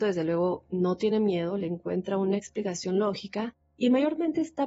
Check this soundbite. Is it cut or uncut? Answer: uncut